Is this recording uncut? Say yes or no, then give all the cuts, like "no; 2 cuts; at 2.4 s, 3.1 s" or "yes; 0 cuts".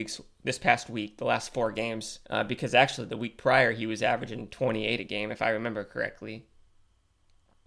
no; 1 cut; at 2.2 s